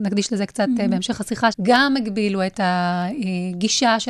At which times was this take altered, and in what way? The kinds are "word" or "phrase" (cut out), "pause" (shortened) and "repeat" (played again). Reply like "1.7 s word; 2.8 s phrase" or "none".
1.5 s word